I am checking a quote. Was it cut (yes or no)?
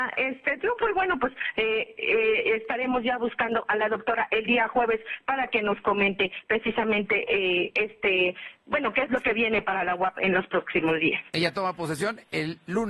no